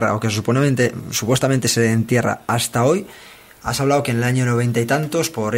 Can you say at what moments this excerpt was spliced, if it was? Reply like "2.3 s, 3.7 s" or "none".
none

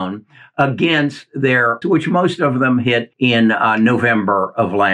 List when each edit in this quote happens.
1.8 s, 3.1 s

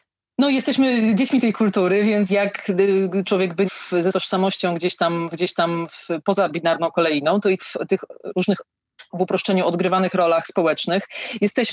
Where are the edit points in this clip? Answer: 2.3 s, 3.6 s, 4.1 s, 5.3 s, 7.6 s, 9.1 s

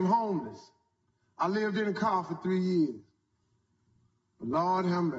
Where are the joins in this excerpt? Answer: none

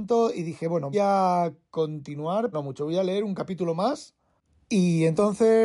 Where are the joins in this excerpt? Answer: 0.9 s, 2.5 s

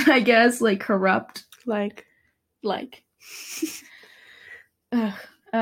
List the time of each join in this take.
none

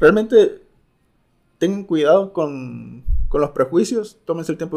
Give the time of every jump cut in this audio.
none

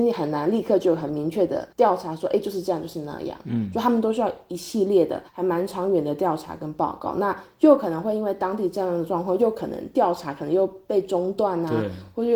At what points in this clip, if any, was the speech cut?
5.3 s

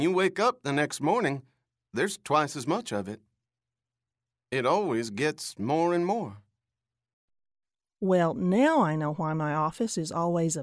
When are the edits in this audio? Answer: none

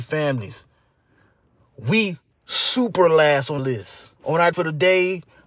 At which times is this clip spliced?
2.3 s, 3.6 s, 4.2 s, 4.5 s

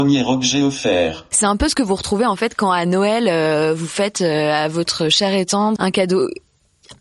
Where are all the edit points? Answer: 5.8 s

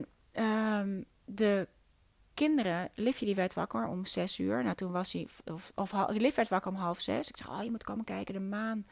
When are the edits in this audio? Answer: none

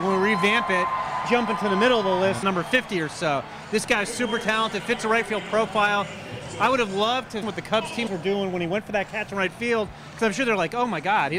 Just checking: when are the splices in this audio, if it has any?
1.2 s, 2.4 s, 7.4 s, 8.1 s

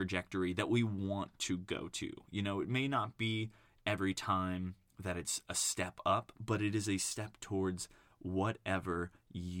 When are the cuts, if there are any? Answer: none

